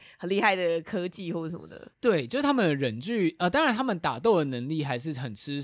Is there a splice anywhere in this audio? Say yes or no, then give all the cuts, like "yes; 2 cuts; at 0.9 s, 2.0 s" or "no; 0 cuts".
yes; 1 cut; at 1.9 s